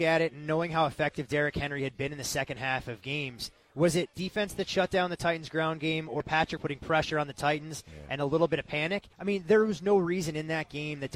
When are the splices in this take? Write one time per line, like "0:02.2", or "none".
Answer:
0:04.1
0:06.2
0:06.6
0:09.1

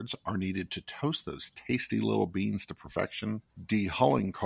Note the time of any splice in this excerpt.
0:03.5

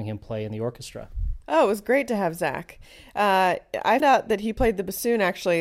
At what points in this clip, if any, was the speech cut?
0:01.4
0:04.0

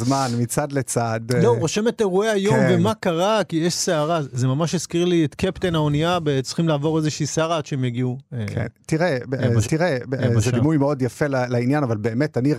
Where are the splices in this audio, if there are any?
0:09.6

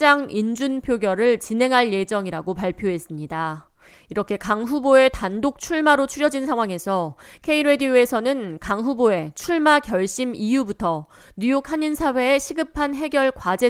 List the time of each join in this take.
none

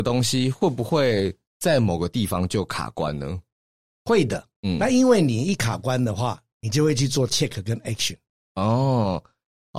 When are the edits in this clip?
none

